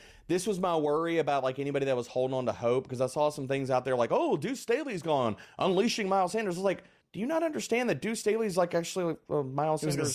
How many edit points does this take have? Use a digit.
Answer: 1